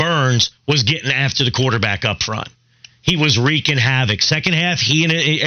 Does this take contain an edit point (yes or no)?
no